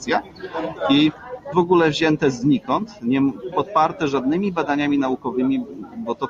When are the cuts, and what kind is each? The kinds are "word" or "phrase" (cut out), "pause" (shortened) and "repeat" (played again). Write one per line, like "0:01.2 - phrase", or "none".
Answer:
0:01.5 - phrase
0:03.5 - word